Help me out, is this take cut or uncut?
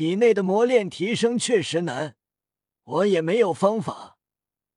uncut